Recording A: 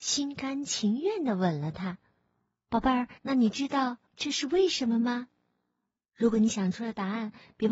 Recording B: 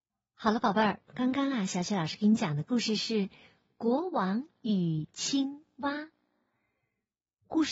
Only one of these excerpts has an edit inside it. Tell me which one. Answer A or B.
A